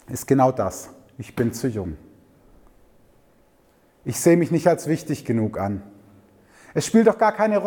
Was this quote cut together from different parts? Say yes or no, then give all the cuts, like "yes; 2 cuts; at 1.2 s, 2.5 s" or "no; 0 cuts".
no; 0 cuts